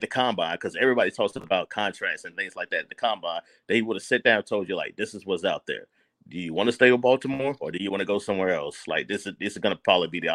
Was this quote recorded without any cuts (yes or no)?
yes